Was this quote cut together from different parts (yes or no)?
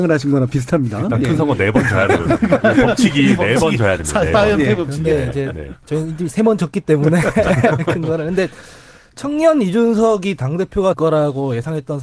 yes